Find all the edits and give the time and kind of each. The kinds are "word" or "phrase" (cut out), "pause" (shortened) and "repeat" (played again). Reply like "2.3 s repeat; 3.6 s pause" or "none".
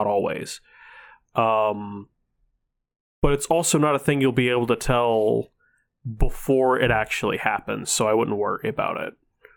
none